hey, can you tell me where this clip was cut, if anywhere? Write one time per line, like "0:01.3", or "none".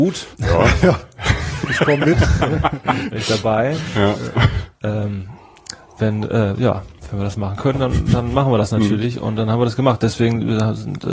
none